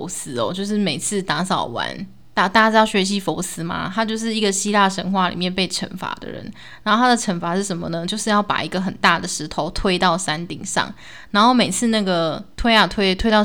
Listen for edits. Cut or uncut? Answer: cut